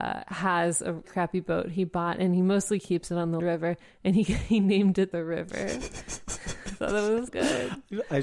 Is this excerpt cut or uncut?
cut